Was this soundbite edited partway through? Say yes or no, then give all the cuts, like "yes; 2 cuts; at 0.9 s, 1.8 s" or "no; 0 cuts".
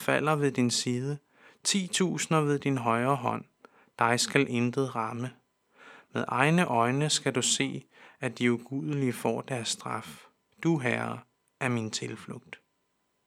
no; 0 cuts